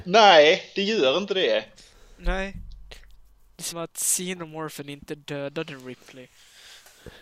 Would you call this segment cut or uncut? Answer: cut